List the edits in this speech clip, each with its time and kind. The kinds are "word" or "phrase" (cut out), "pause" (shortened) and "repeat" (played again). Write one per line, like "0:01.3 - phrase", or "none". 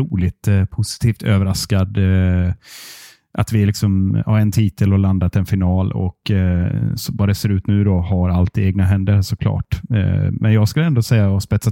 none

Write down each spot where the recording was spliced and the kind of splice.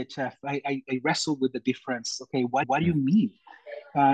0:02.6 - repeat

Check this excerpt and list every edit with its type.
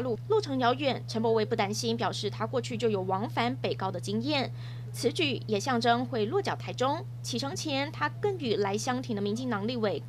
none

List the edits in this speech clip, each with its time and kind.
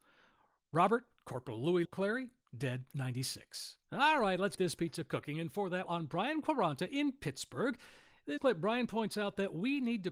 0:01.8 - word
0:02.9 - word
0:03.8 - pause
0:04.6 - word
0:05.9 - phrase
0:08.4 - word

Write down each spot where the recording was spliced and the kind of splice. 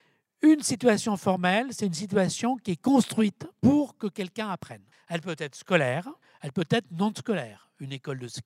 0:04.9 - pause
0:06.2 - pause

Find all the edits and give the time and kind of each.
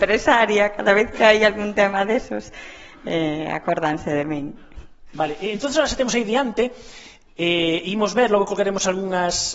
none

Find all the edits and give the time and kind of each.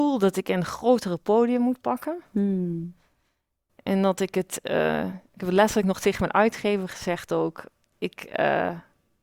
none

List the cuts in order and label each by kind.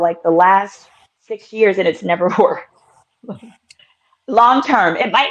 none

